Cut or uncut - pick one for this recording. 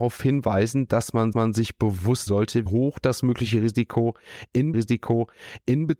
cut